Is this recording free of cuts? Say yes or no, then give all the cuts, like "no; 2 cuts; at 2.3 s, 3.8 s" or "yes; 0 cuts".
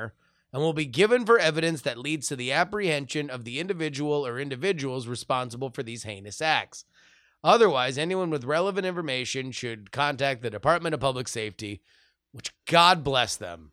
yes; 0 cuts